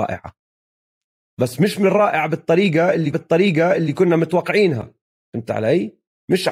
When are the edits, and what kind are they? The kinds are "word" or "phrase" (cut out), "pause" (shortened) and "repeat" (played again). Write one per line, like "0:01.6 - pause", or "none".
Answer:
0:03.1 - repeat
0:05.0 - pause